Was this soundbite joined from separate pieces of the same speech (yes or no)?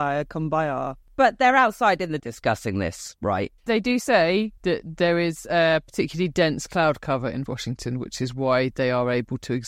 yes